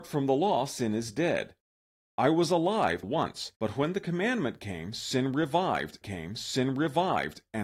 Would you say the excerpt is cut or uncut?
cut